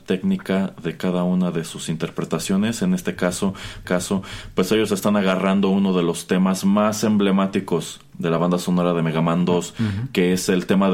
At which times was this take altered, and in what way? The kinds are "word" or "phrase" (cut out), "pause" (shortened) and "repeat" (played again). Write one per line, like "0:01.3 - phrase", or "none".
0:03.8 - repeat